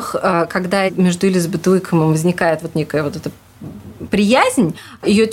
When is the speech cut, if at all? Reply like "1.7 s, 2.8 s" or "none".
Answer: none